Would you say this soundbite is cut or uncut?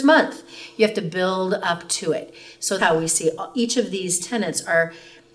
cut